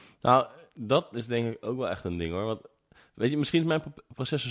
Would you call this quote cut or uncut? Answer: uncut